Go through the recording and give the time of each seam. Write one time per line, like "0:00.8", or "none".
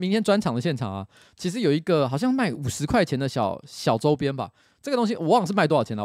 none